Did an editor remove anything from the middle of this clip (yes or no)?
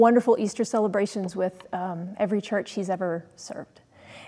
no